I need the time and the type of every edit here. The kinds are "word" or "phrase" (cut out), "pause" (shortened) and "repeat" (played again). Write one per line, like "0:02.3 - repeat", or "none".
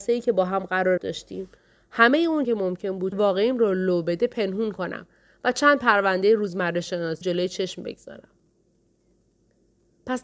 0:01.0 - word
0:02.4 - word
0:03.1 - word
0:07.2 - word